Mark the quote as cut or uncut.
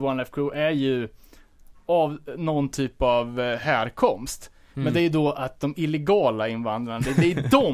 uncut